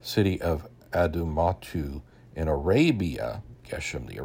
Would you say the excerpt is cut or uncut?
uncut